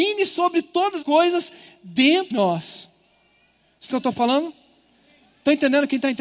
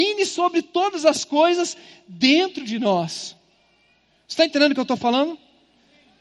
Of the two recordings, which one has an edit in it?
first; 3 cuts; at 1.0 s, 2.3 s, 3.9 s

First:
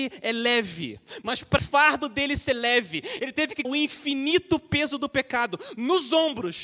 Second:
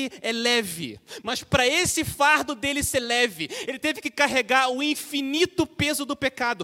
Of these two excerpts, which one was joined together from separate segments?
first; 2 cuts; at 1.6 s, 3.6 s

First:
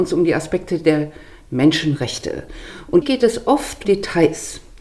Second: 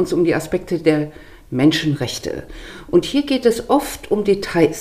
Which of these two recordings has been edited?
first; 2 cuts; at 3.0 s, 3.8 s

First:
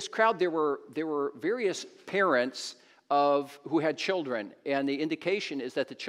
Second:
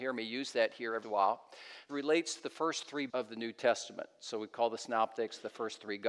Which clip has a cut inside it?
second; 3 cuts; at 1.0 s, 1.9 s, 3.1 s

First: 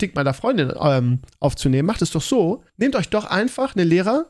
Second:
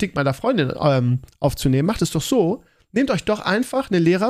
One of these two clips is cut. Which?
first; 1 cut; at 2.7 s

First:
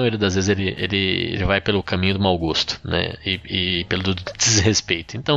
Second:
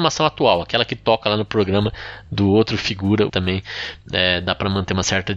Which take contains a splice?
second; 1 cut; at 3.3 s

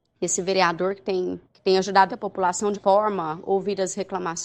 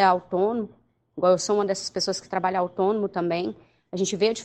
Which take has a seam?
first; 3 cuts; at 1.5 s, 2.1 s, 2.7 s

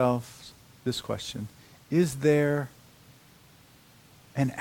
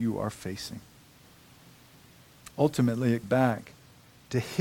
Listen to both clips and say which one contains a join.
second; 2 cuts; at 2.5 s, 3.2 s

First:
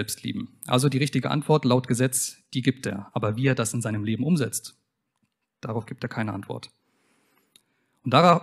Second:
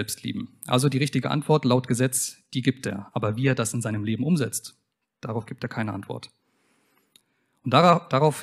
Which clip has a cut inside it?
second; 1 cut; at 4.9 s

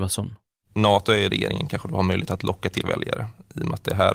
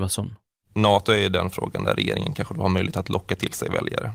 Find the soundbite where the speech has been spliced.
first; 2 cuts; at 1.3 s, 2.8 s

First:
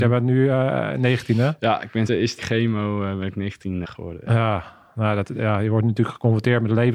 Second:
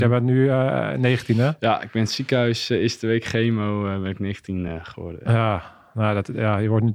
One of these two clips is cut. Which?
first; 3 cuts; at 2.1 s, 2.4 s, 3.8 s

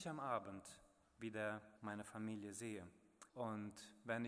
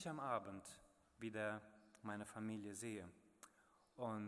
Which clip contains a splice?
first; 2 cuts; at 1.8 s, 3.3 s

